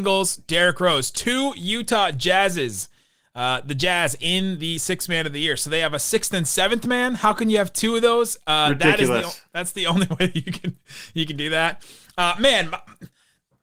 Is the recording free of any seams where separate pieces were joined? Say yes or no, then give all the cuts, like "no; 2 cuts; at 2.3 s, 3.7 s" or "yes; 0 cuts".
yes; 0 cuts